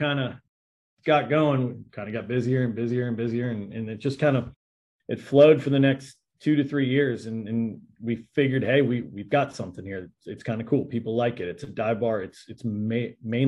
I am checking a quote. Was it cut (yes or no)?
no